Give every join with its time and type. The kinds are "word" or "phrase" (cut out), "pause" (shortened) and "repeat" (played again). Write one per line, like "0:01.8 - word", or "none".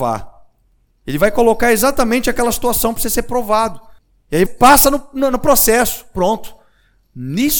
0:04.0 - pause
0:04.5 - word